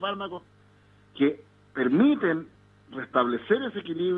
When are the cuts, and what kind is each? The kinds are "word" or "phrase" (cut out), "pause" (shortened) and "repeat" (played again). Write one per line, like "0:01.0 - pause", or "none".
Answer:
none